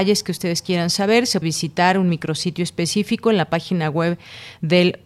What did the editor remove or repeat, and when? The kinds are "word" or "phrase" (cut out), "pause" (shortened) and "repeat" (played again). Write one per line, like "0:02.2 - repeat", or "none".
0:01.4 - word